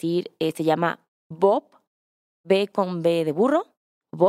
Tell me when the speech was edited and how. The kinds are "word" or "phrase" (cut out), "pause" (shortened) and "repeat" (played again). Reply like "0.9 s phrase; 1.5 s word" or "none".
none